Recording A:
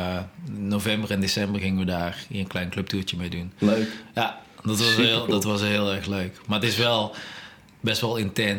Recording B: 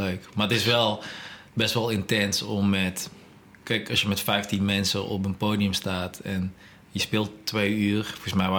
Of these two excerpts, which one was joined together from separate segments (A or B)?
B